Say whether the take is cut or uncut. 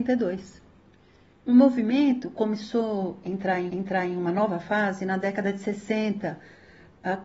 cut